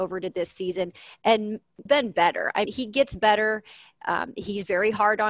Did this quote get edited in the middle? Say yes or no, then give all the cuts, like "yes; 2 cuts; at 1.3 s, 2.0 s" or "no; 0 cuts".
yes; 2 cuts; at 1.9 s, 2.7 s